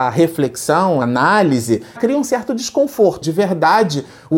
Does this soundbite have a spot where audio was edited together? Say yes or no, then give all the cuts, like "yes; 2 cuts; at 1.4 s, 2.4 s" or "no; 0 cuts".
yes; 3 cuts; at 1.0 s, 2.0 s, 3.2 s